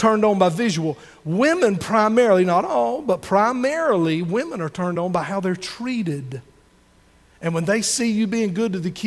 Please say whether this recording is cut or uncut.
uncut